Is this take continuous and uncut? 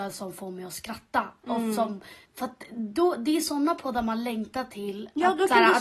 no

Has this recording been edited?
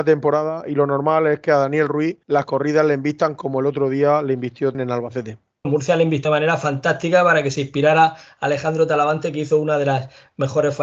yes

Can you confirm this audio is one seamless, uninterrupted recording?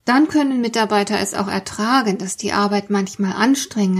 yes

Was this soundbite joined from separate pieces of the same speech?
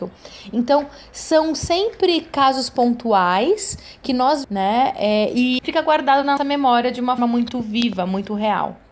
yes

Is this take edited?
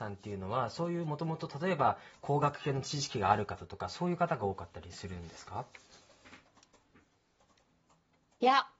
no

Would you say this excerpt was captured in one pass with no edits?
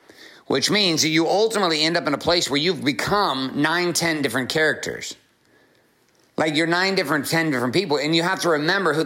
yes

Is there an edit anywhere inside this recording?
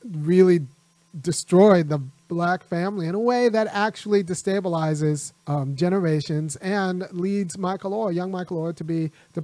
yes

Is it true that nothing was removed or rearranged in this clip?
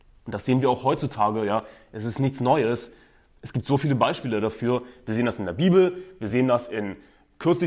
yes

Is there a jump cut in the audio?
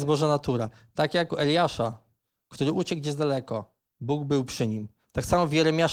yes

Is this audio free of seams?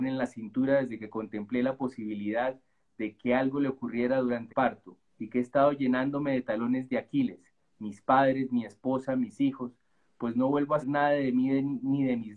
no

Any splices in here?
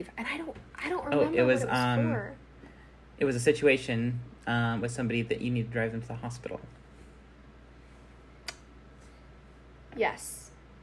no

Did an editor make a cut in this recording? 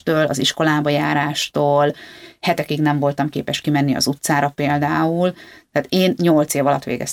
no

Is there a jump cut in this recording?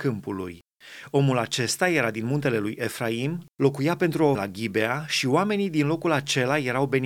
yes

